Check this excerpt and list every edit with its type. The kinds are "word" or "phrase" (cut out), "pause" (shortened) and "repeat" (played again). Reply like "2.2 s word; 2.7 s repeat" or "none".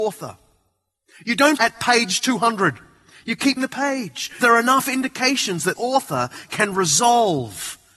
1.6 s word; 3.6 s word; 4.4 s word; 5.8 s word